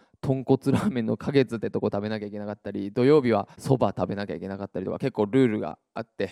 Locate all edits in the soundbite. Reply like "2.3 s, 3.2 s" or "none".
3.5 s

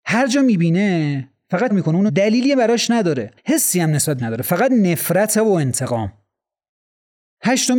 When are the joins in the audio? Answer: 1.7 s, 2.1 s, 3.4 s, 4.2 s

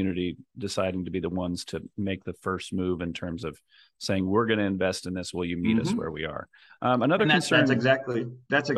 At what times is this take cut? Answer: none

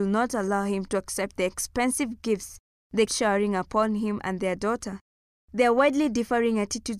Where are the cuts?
3.1 s

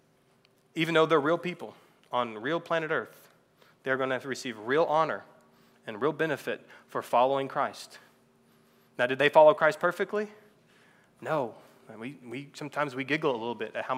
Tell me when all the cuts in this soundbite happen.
none

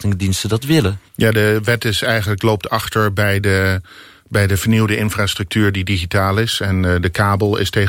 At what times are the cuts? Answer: 1.1 s

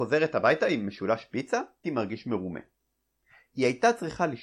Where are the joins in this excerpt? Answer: 1.8 s

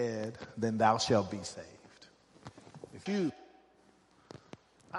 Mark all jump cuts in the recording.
3.1 s

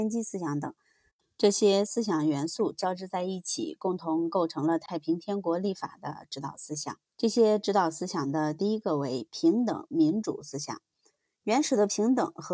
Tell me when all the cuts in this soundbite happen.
7.1 s

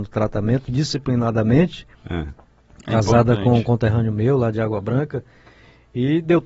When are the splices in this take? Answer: none

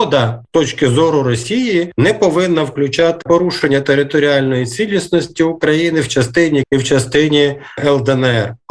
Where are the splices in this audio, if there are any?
3.2 s, 6.6 s

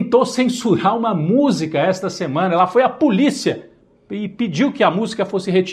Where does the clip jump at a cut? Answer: none

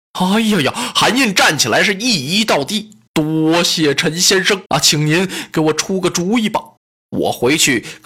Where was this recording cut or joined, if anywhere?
3.1 s, 4.7 s, 6.8 s

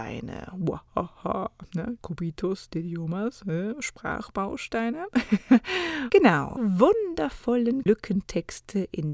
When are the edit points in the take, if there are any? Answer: 2.0 s, 6.6 s, 7.9 s

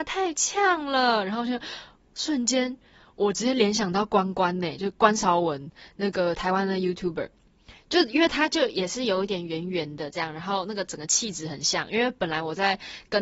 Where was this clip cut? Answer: none

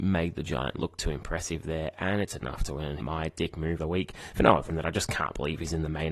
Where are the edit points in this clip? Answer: 3.0 s, 3.8 s, 4.7 s

